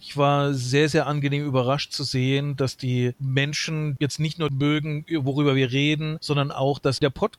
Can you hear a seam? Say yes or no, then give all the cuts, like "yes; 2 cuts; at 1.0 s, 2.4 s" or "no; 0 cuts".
no; 0 cuts